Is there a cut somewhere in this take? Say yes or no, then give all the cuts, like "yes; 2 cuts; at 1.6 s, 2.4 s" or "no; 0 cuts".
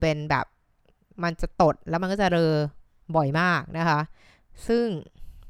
no; 0 cuts